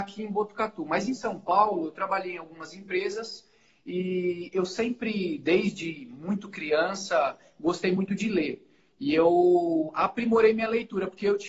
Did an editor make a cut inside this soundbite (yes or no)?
no